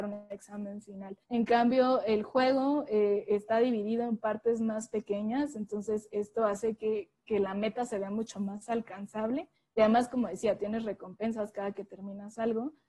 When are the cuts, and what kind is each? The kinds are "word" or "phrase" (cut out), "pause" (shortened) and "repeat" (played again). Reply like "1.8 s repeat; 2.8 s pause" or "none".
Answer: 1.2 s pause; 9.6 s pause